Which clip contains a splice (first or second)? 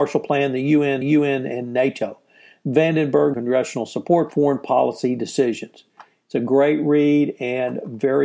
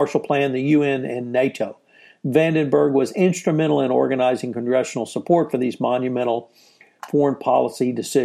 first